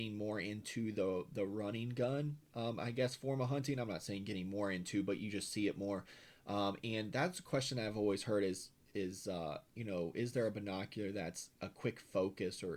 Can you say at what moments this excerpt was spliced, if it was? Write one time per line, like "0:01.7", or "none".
none